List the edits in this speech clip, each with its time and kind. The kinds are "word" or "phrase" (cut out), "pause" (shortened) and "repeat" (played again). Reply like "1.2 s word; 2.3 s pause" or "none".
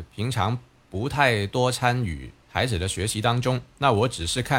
2.4 s pause